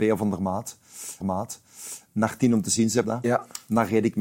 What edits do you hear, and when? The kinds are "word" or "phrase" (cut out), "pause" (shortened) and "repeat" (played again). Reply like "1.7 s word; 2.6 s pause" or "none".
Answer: 1.2 s repeat; 3.0 s word